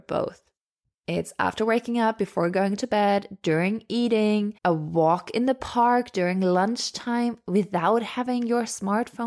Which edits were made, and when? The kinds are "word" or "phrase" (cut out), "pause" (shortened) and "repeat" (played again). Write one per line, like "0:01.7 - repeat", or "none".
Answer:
0:04.6 - pause